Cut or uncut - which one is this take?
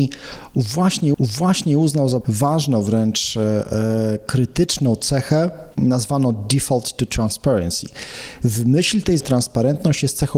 cut